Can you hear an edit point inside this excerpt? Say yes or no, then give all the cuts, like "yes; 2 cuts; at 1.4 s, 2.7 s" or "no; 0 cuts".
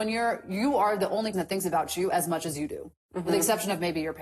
yes; 1 cut; at 1.3 s